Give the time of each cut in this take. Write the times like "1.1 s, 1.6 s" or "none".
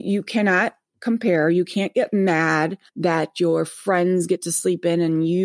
2.9 s